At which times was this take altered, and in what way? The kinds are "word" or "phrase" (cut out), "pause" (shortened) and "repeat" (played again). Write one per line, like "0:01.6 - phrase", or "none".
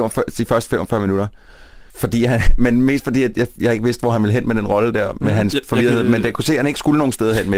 0:01.9 - pause